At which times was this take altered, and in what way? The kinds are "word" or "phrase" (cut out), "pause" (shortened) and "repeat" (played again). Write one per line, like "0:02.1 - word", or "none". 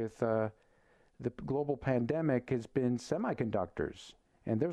none